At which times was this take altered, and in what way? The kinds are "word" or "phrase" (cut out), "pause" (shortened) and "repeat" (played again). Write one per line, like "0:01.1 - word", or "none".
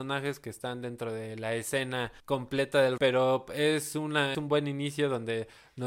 0:02.2 - pause
0:03.0 - word
0:04.3 - word